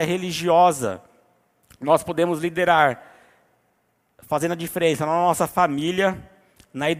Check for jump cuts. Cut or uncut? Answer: uncut